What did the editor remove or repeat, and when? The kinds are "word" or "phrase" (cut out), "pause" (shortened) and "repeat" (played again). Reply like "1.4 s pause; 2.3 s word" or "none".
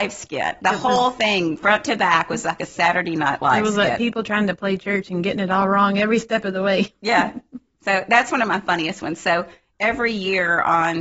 none